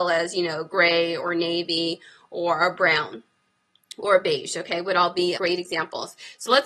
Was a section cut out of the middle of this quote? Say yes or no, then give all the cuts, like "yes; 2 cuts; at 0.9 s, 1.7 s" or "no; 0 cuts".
yes; 1 cut; at 5.3 s